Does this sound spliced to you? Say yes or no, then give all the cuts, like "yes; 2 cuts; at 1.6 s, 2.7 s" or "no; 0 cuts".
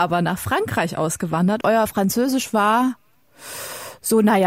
yes; 1 cut; at 1.6 s